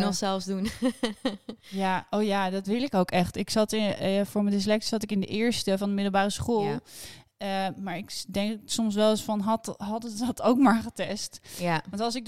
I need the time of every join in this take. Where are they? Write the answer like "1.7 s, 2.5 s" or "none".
1.6 s

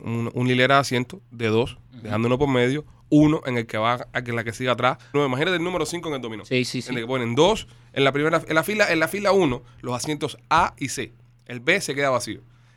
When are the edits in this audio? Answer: 5.1 s

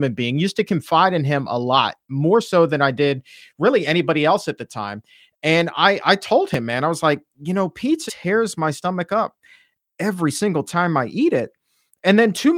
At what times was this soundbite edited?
8.1 s

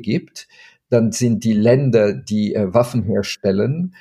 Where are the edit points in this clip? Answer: none

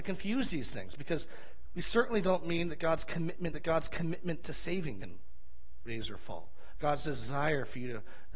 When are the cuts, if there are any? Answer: 3.5 s, 5.0 s

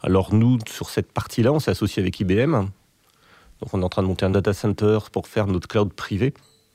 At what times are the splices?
4.3 s

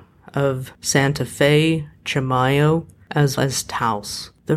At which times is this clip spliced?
3.4 s

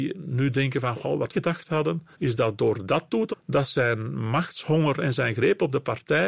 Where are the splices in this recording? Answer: 1.3 s, 2.1 s, 3.3 s

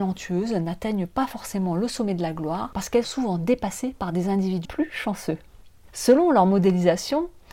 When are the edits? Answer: 3.0 s, 4.6 s

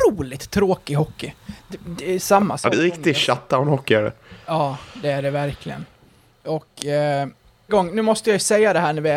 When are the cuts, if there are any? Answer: 2.7 s, 7.7 s

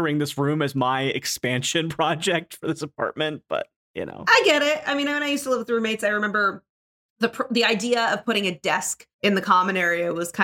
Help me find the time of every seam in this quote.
9.1 s

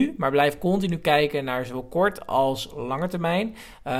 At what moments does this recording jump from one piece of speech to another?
none

